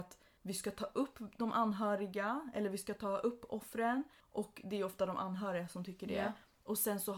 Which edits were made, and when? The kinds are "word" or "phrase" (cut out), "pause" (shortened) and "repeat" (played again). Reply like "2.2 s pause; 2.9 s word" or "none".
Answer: none